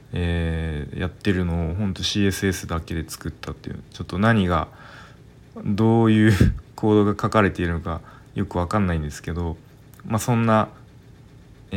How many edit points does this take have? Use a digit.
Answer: 0